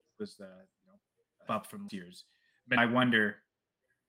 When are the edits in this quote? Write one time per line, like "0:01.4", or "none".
0:01.5
0:01.9
0:02.8